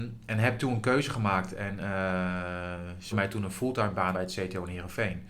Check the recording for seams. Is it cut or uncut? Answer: cut